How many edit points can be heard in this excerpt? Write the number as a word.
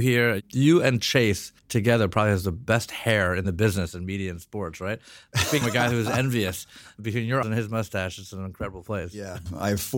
three